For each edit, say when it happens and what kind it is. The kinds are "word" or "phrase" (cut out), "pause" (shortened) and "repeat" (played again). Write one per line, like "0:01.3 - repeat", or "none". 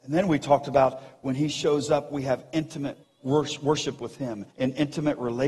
0:03.0 - pause
0:04.5 - pause